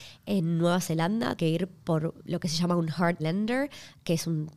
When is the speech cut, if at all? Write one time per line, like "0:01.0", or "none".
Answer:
0:01.4
0:02.2
0:03.2